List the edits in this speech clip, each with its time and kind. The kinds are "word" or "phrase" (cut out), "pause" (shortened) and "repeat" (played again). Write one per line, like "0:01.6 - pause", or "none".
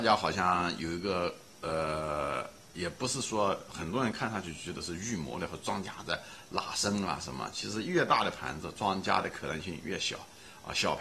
0:02.7 - pause